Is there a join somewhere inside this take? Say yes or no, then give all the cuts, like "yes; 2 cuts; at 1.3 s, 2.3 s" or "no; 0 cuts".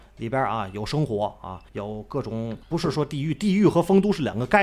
yes; 2 cuts; at 1.7 s, 2.6 s